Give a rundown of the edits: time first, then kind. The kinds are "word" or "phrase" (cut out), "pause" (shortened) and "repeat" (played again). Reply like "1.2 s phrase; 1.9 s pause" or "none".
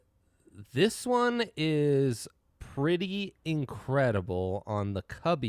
none